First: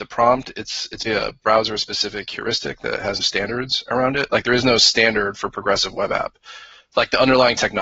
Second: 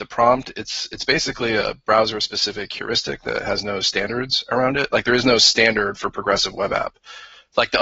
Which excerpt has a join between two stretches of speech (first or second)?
first